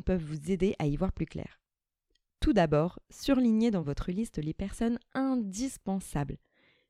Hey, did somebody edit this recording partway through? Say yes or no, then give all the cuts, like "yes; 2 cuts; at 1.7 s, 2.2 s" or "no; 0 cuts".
no; 0 cuts